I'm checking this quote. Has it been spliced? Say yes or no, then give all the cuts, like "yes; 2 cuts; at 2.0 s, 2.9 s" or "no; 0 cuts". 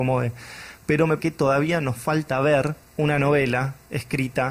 yes; 2 cuts; at 1.2 s, 2.8 s